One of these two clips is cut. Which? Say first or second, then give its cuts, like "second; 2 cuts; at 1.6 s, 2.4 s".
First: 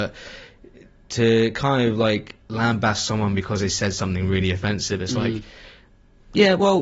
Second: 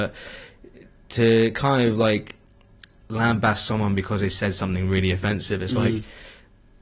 first; 1 cut; at 2.4 s